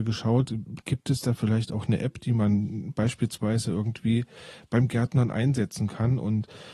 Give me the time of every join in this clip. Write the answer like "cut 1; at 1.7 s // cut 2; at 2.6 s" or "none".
none